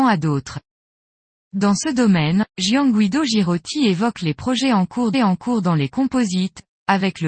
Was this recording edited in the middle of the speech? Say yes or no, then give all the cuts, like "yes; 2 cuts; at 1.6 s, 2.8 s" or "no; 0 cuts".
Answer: yes; 2 cuts; at 2.5 s, 5.1 s